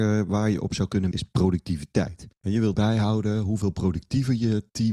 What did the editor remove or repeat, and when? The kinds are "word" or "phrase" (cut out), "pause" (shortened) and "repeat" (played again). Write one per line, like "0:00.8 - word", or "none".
0:01.1 - word
0:02.3 - pause
0:02.7 - word